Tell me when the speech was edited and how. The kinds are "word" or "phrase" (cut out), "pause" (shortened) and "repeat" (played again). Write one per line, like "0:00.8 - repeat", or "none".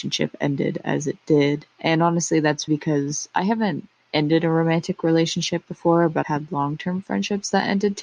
0:01.7 - pause
0:02.7 - phrase
0:06.2 - word